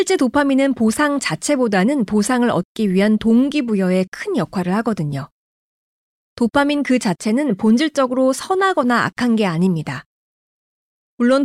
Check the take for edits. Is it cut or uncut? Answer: uncut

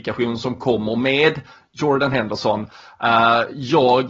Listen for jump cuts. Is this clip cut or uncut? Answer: uncut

